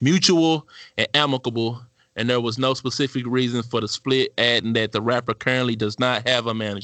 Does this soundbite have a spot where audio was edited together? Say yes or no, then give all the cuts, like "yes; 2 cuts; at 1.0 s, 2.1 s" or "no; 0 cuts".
no; 0 cuts